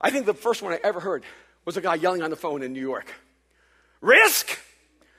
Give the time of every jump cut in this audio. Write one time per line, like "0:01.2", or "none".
none